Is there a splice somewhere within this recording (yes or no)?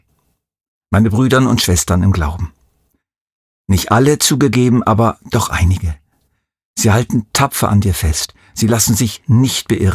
no